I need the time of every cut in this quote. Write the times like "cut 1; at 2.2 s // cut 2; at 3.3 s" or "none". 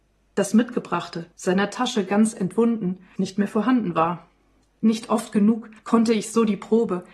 cut 1; at 1.3 s // cut 2; at 3.2 s // cut 3; at 4.6 s // cut 4; at 5.8 s